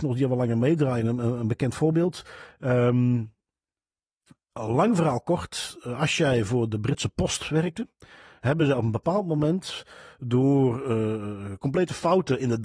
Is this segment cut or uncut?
uncut